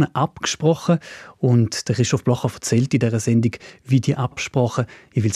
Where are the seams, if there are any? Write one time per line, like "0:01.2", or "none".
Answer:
none